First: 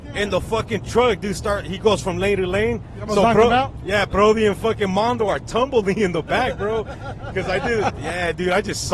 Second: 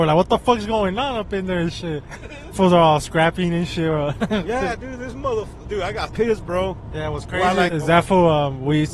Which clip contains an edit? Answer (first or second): second